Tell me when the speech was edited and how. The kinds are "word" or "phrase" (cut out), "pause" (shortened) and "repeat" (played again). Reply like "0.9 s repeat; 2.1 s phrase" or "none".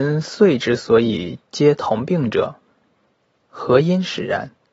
none